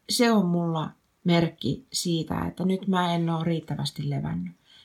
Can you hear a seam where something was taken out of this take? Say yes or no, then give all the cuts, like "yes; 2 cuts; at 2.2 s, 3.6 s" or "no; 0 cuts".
no; 0 cuts